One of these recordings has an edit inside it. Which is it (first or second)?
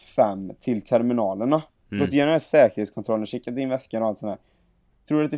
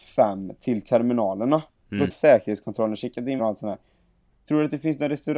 second